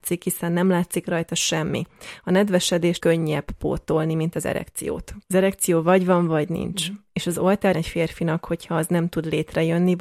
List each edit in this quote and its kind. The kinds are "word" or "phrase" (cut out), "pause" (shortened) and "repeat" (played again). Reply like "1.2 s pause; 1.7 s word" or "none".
3.0 s word; 5.2 s pause; 7.7 s word

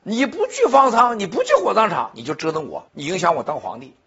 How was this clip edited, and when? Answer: 2.9 s pause

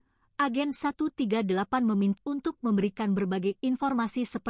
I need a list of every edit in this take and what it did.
2.2 s word

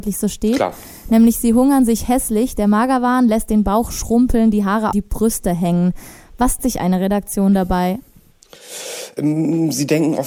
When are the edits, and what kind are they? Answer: 4.9 s phrase; 6.6 s word

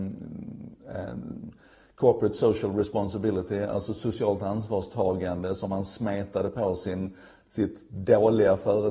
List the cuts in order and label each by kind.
none

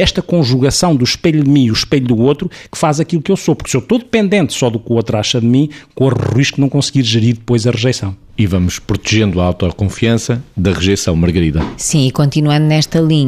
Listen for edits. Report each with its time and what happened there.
none

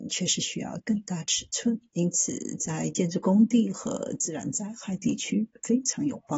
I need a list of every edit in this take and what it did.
1.9 s pause

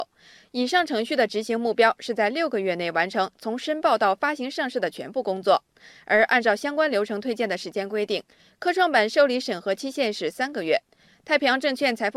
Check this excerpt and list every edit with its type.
none

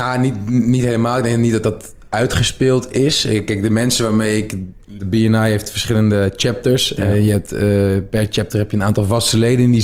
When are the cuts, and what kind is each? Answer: 5.0 s phrase

